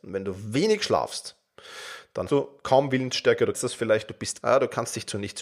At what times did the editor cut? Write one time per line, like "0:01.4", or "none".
0:02.3
0:03.5
0:04.4